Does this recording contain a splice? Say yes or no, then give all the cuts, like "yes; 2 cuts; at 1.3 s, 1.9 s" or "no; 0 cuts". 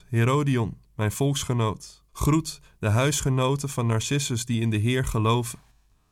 yes; 1 cut; at 2.1 s